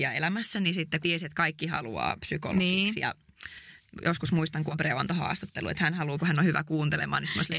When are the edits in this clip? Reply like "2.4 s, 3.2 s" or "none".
1.0 s, 4.7 s, 6.2 s